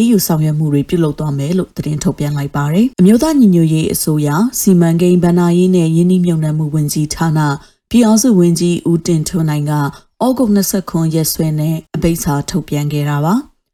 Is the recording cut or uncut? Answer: cut